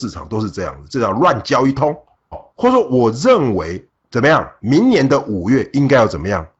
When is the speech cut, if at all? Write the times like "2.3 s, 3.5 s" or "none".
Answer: 2.3 s